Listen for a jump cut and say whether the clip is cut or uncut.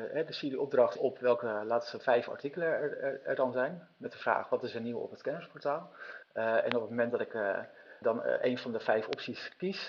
cut